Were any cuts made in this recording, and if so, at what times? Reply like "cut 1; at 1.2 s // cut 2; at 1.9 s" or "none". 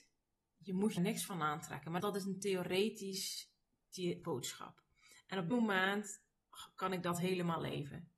cut 1; at 1.0 s // cut 2; at 2.0 s // cut 3; at 4.2 s // cut 4; at 5.5 s